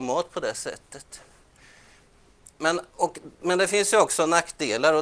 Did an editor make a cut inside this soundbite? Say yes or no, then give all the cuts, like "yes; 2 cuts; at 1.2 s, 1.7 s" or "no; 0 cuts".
yes; 1 cut; at 2.9 s